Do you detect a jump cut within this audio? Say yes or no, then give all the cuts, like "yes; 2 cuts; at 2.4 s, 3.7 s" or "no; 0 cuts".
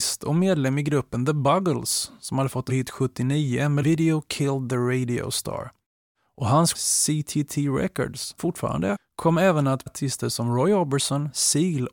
yes; 6 cuts; at 2.7 s, 3.8 s, 6.7 s, 8.4 s, 8.9 s, 9.9 s